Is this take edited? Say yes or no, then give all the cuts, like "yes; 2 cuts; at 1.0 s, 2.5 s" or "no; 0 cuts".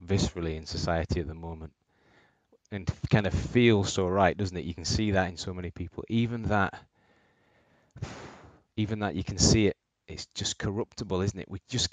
yes; 1 cut; at 8.7 s